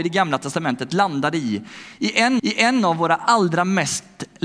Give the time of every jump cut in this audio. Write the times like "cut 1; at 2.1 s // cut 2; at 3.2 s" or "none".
cut 1; at 2.4 s